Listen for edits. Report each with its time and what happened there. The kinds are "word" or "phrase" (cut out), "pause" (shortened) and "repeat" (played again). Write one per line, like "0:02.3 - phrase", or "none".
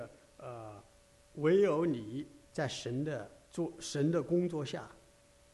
0:00.9 - pause
0:02.4 - pause
0:03.5 - pause